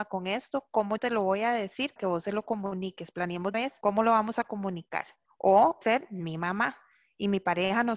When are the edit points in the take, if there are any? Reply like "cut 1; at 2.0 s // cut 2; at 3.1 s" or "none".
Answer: cut 1; at 1.0 s // cut 2; at 2.0 s // cut 3; at 3.5 s // cut 4; at 5.8 s